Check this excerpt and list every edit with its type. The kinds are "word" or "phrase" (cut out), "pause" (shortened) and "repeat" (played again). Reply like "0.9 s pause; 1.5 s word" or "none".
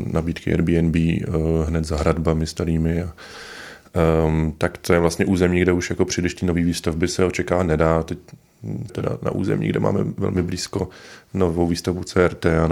8.9 s word